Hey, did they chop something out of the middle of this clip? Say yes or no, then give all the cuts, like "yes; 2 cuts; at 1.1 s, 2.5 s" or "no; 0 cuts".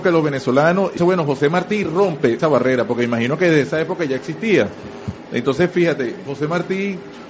yes; 2 cuts; at 1.0 s, 2.4 s